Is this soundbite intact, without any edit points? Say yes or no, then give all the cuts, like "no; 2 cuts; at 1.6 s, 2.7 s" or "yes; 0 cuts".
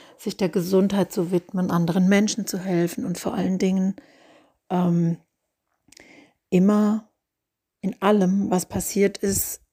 yes; 0 cuts